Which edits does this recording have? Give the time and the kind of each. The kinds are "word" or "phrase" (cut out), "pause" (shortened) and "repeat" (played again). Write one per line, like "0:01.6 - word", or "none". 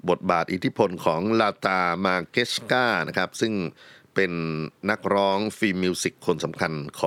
none